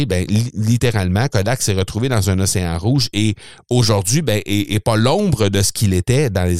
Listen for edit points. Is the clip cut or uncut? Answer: uncut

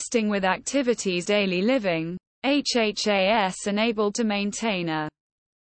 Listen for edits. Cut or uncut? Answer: cut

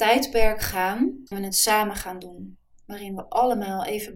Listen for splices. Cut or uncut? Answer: cut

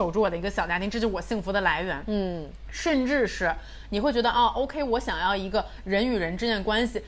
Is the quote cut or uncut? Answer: uncut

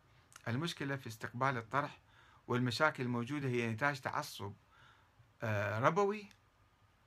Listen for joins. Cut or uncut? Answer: uncut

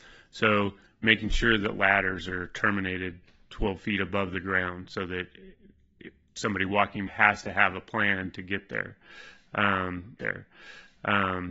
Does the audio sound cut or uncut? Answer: cut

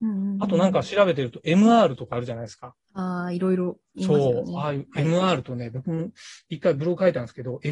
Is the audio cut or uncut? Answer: cut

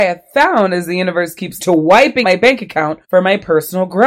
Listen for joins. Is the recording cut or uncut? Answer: cut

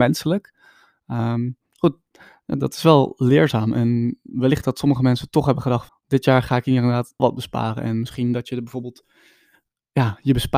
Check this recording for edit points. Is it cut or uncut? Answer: cut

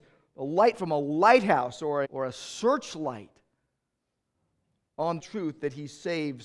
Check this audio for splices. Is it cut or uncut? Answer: cut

